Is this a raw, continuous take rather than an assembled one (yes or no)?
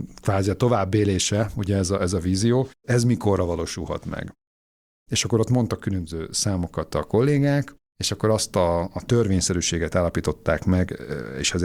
no